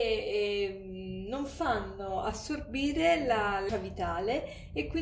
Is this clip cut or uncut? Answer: cut